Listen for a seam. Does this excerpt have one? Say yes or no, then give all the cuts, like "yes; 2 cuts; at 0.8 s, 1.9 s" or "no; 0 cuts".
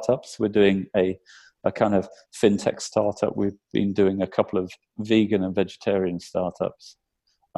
no; 0 cuts